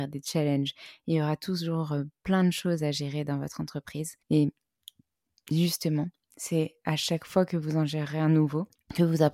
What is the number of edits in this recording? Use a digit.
1